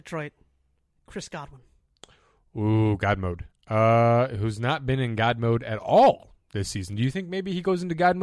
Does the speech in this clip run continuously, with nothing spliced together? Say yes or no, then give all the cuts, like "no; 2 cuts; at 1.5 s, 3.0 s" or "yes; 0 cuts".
yes; 0 cuts